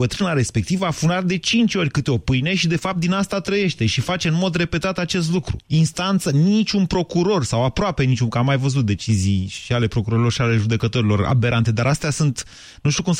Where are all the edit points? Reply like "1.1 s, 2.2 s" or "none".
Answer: 5.6 s